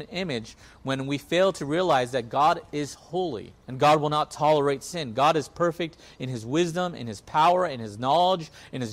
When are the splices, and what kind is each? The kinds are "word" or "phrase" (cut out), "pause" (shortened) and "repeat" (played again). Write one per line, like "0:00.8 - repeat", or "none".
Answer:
0:03.6 - pause